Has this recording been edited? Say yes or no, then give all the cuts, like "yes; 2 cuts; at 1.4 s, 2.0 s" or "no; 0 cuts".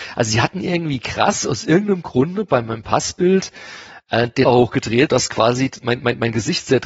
yes; 2 cuts; at 4.5 s, 5.1 s